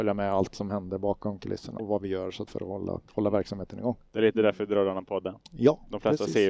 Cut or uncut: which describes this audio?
cut